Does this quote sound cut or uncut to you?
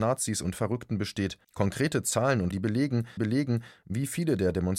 cut